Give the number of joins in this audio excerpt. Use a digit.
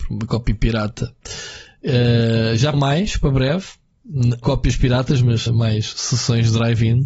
3